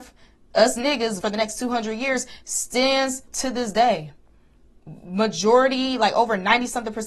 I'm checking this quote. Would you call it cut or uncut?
cut